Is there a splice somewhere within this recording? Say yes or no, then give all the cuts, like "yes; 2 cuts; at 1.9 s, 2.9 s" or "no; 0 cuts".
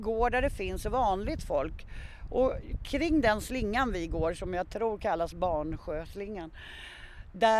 no; 0 cuts